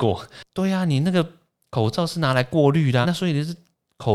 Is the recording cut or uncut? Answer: cut